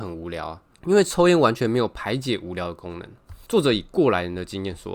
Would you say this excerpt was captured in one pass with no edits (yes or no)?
no